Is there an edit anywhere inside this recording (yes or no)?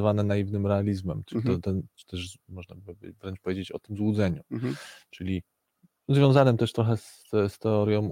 no